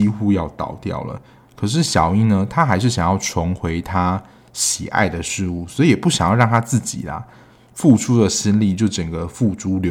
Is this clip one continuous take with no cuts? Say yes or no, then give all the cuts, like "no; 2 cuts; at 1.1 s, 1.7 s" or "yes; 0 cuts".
yes; 0 cuts